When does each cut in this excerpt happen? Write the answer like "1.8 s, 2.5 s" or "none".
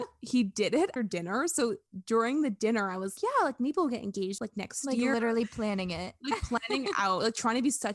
1.0 s, 3.2 s, 4.4 s